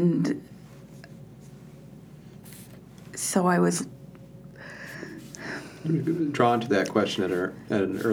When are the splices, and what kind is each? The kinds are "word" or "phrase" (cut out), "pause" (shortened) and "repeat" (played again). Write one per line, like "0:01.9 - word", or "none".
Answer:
none